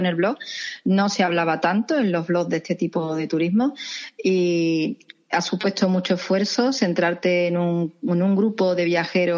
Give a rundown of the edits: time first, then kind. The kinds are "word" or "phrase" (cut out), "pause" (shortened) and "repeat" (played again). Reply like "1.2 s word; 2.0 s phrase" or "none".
8.0 s pause